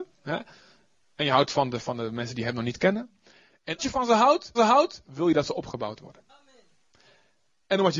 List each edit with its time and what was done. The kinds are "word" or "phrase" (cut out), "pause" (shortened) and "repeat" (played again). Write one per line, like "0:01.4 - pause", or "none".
0:03.8 - word
0:04.5 - repeat
0:06.3 - pause